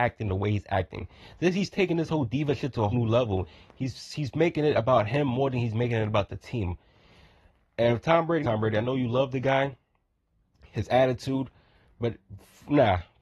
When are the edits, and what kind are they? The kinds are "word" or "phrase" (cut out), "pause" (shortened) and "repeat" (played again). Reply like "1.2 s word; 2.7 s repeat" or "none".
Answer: 2.9 s word; 8.4 s word

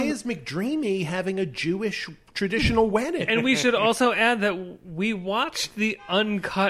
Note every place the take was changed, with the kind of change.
none

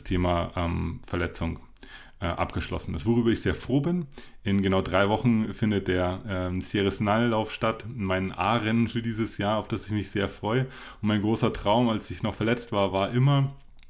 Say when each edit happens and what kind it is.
none

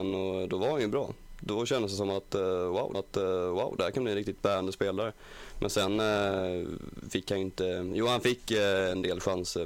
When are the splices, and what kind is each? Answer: 2.9 s repeat

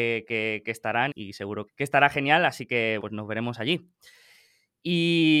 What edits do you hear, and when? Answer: 1.1 s word; 1.7 s word; 3.0 s word

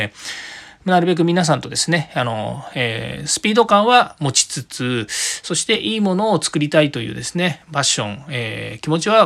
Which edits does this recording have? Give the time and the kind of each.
none

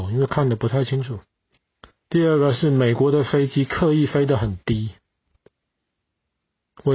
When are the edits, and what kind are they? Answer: 1.5 s pause

